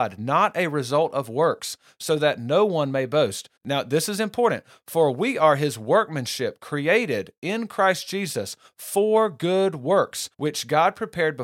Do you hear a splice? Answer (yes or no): yes